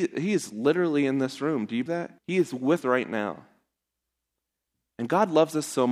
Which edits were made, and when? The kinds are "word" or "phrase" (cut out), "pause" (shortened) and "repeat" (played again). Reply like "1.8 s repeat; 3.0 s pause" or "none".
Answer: 1.9 s word; 2.2 s pause; 2.8 s word

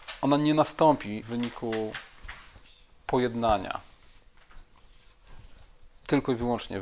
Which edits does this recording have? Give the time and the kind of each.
1.2 s word

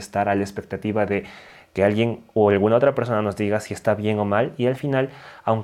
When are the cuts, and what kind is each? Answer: none

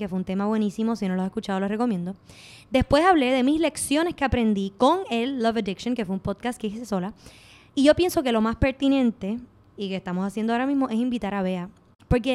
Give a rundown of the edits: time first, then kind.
none

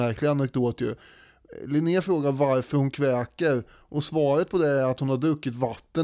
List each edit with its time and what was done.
none

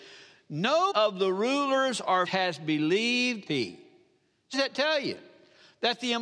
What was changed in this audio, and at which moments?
0.9 s word; 2.3 s word; 3.5 s phrase; 4.5 s word

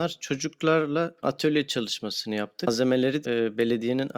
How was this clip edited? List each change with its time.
1.2 s word; 3.2 s word

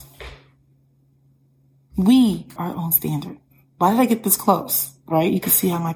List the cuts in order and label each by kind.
2.6 s word

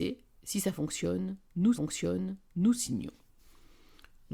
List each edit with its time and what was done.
1.7 s repeat

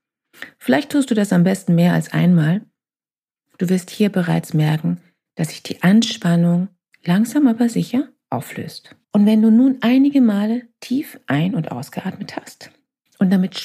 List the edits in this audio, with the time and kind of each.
9.0 s pause

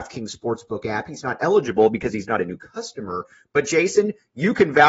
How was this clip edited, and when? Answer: none

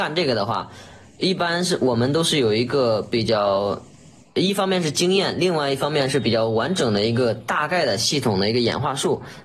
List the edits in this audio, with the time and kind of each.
none

